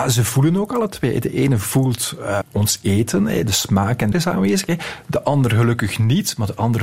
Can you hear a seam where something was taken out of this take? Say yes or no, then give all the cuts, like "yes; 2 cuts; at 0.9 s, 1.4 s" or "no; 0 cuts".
yes; 2 cuts; at 2.4 s, 4.1 s